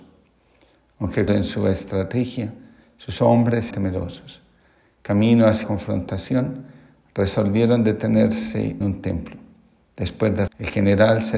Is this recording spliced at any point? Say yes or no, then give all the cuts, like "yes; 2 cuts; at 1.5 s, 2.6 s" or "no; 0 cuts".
yes; 5 cuts; at 1.3 s, 3.7 s, 5.6 s, 8.8 s, 10.5 s